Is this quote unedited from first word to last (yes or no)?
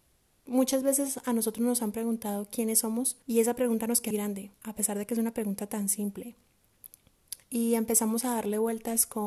no